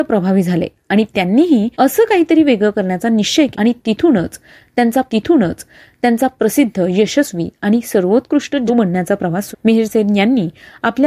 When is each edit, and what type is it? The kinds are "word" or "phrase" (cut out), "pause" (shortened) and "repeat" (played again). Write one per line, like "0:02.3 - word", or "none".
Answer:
0:01.7 - pause
0:03.5 - word
0:05.1 - repeat
0:08.7 - word
0:09.5 - phrase